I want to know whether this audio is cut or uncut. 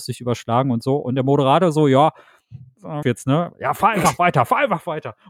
cut